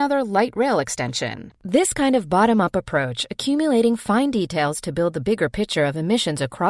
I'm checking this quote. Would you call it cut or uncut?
cut